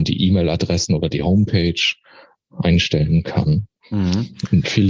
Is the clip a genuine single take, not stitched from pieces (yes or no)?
yes